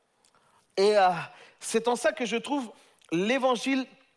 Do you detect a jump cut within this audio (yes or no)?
no